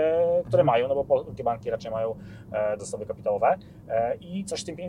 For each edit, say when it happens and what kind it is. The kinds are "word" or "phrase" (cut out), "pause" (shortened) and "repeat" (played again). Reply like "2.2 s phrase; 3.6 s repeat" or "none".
1.4 s word; 2.8 s word